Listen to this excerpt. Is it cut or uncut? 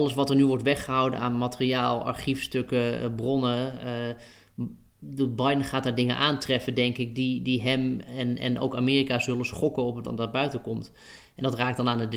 cut